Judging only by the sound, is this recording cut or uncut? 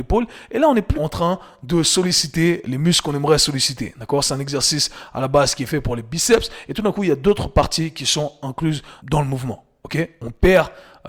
cut